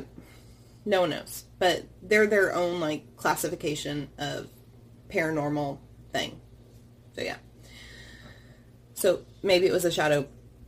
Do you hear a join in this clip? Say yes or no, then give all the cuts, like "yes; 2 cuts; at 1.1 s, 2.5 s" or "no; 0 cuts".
no; 0 cuts